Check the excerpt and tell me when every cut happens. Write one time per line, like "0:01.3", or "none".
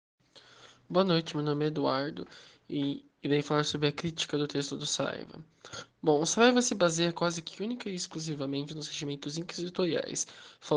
none